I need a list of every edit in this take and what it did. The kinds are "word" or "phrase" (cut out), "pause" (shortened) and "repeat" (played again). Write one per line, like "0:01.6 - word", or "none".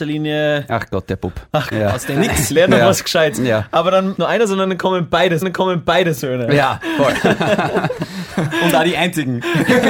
0:01.7 - word
0:02.2 - word
0:04.2 - phrase
0:05.4 - repeat